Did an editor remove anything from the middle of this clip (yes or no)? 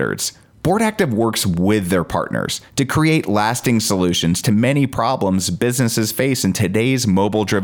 no